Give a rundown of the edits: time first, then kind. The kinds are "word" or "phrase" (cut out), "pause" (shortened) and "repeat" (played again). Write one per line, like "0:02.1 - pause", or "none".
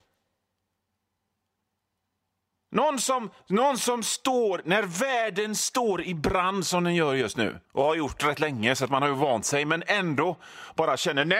0:03.4 - pause
0:07.6 - pause